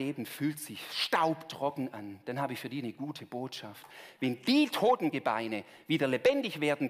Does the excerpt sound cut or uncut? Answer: uncut